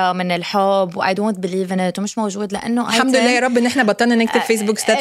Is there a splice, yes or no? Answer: no